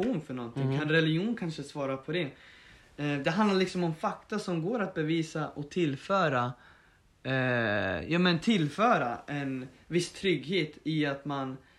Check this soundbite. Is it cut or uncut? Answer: uncut